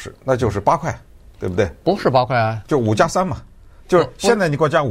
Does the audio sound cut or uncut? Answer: uncut